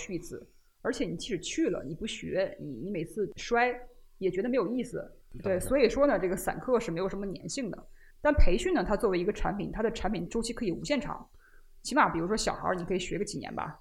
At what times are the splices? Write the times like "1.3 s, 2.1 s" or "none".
5.2 s, 8.1 s